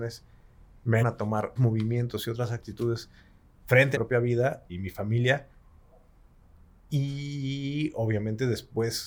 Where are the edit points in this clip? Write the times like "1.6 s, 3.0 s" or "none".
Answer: 1.0 s, 1.6 s, 3.9 s, 4.7 s